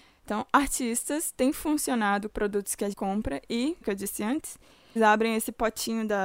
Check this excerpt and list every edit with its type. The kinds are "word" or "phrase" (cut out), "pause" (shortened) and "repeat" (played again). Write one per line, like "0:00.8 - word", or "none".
0:02.3 - word
0:02.9 - word
0:03.8 - word
0:05.0 - word

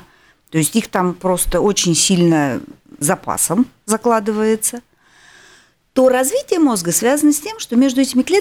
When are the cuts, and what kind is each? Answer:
0:03.0 - word

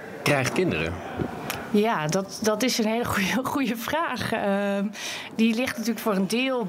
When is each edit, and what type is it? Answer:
none

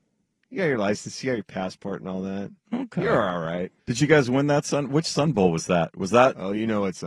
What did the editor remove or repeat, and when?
0:03.8 - pause

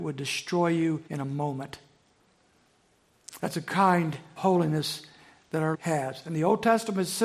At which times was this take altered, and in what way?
0:01.1 - pause
0:04.4 - word
0:05.7 - word

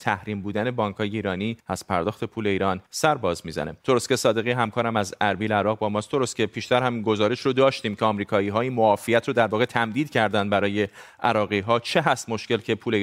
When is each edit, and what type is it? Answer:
0:01.6 - pause
0:02.9 - pause
0:03.8 - pause

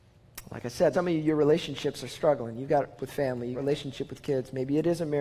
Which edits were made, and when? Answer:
0:00.9 - word
0:03.0 - word
0:03.5 - word

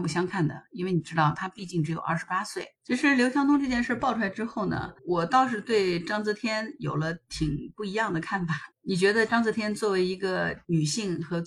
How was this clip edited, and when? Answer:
0:02.8 - pause
0:05.0 - pause
0:08.7 - pause

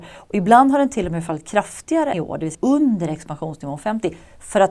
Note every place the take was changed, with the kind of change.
0:02.1 - word
0:02.5 - word

